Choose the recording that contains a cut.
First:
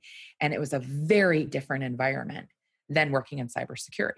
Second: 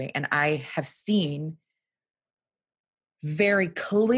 first; 1 cut; at 1.5 s

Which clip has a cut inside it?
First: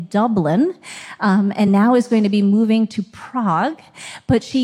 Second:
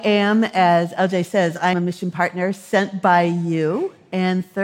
second; 1 cut; at 1.7 s

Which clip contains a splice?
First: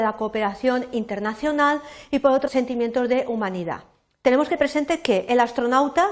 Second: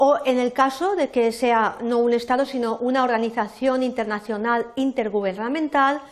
first; 2 cuts; at 2.5 s, 4.6 s

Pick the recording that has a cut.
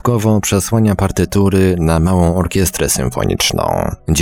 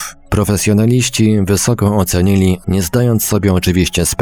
second; 1 cut; at 2.6 s

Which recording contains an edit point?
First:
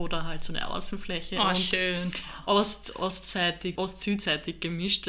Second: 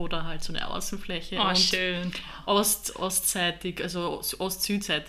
first; 1 cut; at 3.8 s

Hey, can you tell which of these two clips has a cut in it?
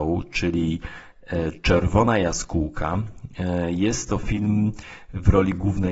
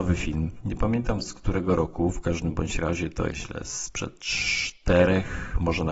second; 1 cut; at 3.3 s

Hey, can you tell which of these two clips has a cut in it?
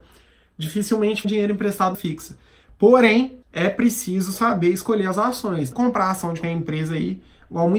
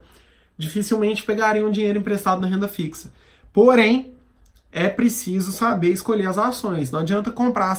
first; 5 cuts; at 1.2 s, 1.9 s, 3.4 s, 5.7 s, 6.4 s

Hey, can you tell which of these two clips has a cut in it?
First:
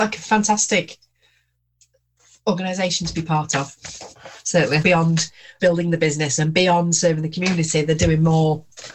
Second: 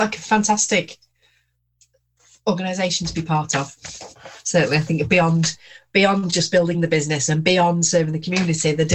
first; 2 cuts; at 4.8 s, 5.6 s

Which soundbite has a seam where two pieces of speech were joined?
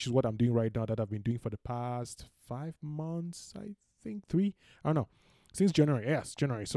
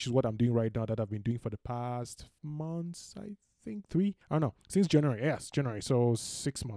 second; 3 cuts; at 2.4 s, 4.2 s, 4.6 s

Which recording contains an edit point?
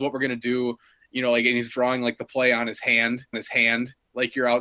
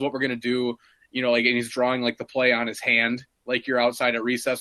first; 1 cut; at 3.3 s

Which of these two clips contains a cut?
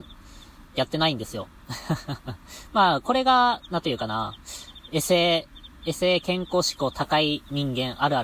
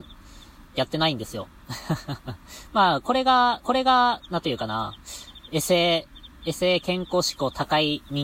second; 1 cut; at 3.6 s

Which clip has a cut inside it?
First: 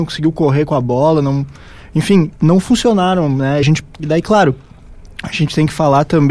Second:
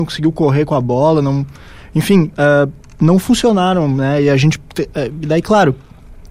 first; 3 cuts; at 2.3 s, 3.6 s, 4.0 s

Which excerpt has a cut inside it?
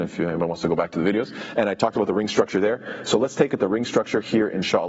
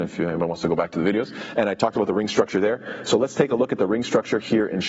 first; 1 cut; at 3.5 s

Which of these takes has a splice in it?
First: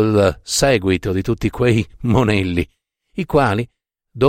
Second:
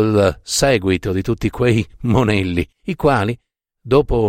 second; 1 cut; at 2.7 s

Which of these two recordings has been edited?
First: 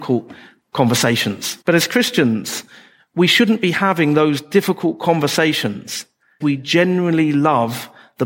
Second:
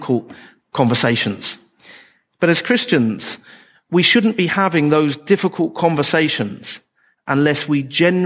first; 2 cuts; at 1.6 s, 6.4 s

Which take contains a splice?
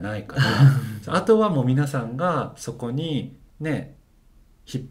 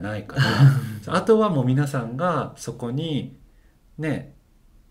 first; 1 cut; at 3.5 s

